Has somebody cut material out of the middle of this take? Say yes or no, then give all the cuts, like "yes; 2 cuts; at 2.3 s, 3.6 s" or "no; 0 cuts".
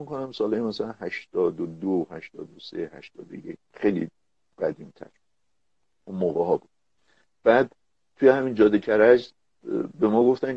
no; 0 cuts